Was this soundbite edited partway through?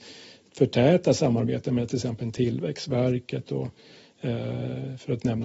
no; 0 cuts

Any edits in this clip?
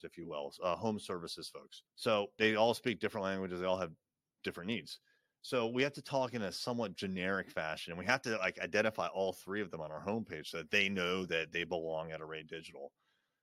yes; 1 cut; at 1.9 s

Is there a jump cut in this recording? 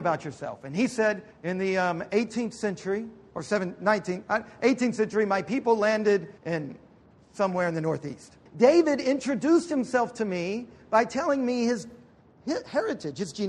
yes; 3 cuts; at 1.3 s, 6.4 s, 8.5 s

